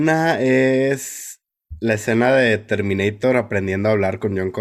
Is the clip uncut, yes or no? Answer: yes